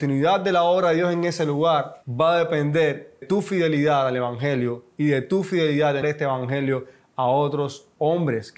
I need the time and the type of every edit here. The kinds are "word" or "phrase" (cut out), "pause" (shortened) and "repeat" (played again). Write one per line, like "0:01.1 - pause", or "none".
0:03.2 - word
0:06.0 - word